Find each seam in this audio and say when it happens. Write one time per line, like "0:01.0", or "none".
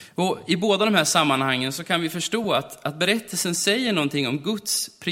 none